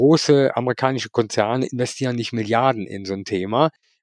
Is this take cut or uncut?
uncut